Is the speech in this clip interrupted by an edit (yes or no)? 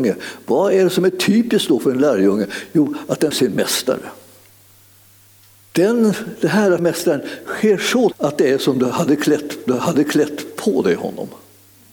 yes